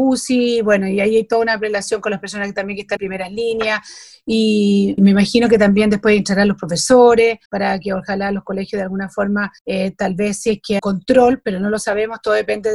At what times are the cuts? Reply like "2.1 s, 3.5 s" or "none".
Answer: 3.0 s, 5.0 s, 7.4 s, 9.6 s, 10.8 s